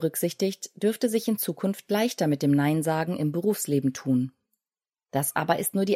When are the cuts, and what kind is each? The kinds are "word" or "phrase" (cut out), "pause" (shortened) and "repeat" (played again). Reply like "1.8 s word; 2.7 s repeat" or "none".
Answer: none